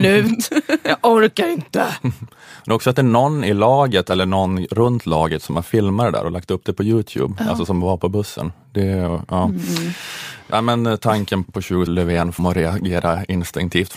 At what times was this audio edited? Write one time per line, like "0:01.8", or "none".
0:11.4
0:11.9
0:12.4